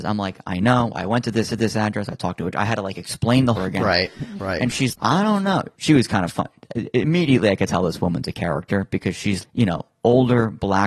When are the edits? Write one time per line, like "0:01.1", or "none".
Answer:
0:01.5
0:03.6
0:04.9
0:05.8
0:09.4